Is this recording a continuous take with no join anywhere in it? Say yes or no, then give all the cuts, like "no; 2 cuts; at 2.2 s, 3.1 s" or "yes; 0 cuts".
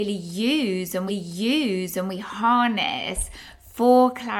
no; 1 cut; at 1.1 s